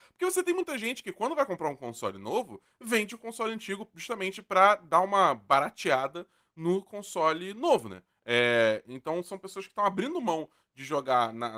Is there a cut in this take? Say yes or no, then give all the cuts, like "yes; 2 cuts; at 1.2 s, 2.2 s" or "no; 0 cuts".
no; 0 cuts